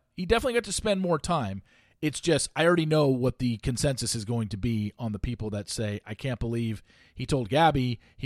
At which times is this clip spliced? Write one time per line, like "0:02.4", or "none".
none